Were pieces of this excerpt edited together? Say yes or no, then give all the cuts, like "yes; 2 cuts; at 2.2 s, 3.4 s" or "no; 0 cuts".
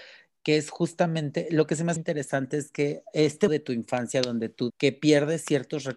yes; 3 cuts; at 2.0 s, 3.5 s, 4.7 s